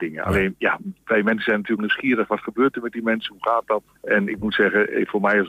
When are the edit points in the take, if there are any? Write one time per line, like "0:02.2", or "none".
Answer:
0:01.8
0:03.9